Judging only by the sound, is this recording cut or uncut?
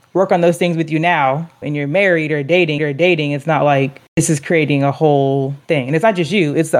cut